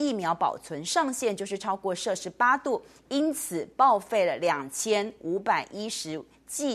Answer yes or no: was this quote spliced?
no